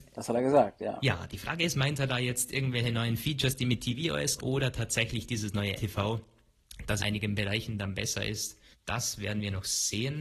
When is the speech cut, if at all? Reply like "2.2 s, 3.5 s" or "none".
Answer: 4.4 s, 5.8 s, 7.0 s, 8.7 s